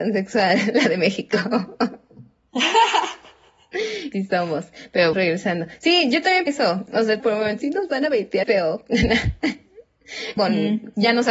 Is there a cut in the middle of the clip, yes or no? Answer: yes